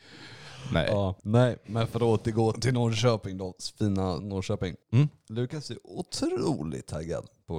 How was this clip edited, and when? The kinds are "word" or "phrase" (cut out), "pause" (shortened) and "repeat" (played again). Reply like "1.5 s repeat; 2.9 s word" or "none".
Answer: 1.2 s pause; 2.5 s word; 4.2 s word; 4.8 s pause